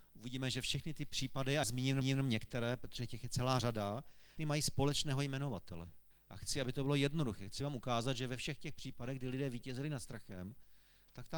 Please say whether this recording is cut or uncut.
cut